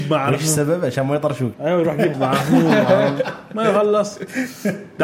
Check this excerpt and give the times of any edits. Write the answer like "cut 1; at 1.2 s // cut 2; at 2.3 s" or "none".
cut 1; at 1.5 s // cut 2; at 2.1 s